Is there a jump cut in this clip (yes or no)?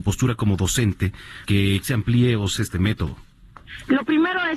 yes